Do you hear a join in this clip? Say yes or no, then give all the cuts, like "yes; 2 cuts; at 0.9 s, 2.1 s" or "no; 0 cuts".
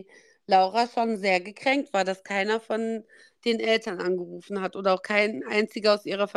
no; 0 cuts